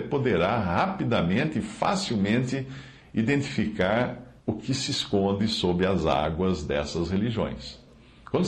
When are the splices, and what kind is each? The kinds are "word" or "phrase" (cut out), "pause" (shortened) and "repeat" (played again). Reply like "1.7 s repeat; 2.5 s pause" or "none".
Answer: 4.4 s pause